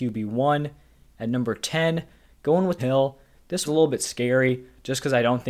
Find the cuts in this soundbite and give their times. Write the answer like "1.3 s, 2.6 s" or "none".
2.8 s, 3.6 s